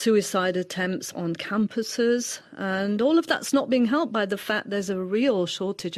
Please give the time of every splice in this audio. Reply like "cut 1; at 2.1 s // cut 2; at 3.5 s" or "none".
none

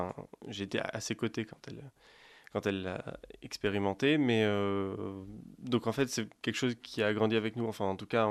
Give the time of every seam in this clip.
none

